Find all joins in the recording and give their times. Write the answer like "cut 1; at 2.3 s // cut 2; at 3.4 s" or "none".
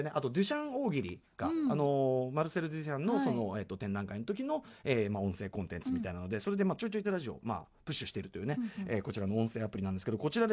cut 1; at 7.0 s